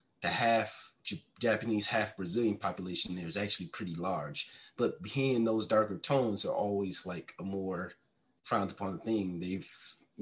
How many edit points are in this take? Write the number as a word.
one